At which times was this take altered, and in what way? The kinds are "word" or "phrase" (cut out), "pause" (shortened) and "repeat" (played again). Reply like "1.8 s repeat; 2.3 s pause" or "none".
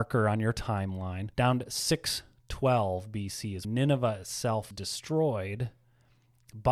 1.3 s pause; 3.6 s word; 4.7 s word